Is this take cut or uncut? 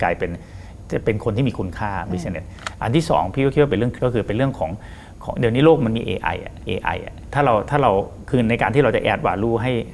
cut